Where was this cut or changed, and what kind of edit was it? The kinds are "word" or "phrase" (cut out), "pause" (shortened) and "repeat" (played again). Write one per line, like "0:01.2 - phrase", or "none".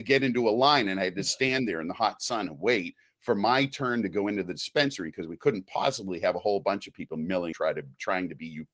0:07.5 - word